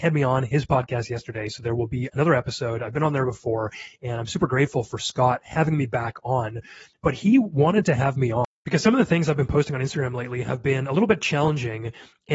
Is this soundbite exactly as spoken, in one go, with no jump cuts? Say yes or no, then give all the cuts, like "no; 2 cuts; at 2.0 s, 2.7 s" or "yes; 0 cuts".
yes; 0 cuts